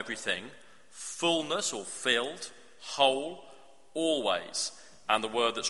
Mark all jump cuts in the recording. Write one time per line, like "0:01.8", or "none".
none